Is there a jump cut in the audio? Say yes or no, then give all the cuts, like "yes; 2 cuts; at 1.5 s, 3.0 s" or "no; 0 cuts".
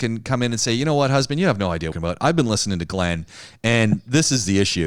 yes; 1 cut; at 1.9 s